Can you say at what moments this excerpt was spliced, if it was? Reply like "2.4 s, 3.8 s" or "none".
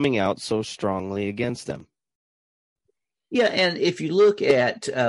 none